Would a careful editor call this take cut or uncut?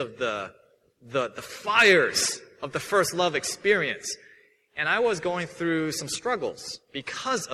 uncut